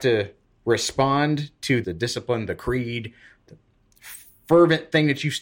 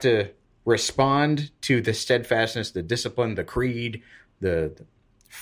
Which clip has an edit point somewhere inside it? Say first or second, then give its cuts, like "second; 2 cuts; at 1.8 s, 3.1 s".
first; 2 cuts; at 1.8 s, 3.5 s